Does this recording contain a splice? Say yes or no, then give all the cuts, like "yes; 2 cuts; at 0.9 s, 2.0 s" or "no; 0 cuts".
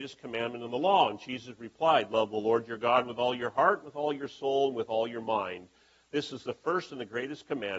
no; 0 cuts